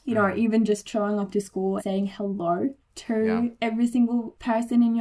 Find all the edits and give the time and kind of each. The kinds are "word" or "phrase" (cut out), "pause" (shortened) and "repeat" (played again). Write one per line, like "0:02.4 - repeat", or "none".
0:01.8 - word
0:02.8 - pause